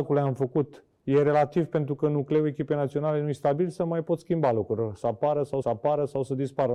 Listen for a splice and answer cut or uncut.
cut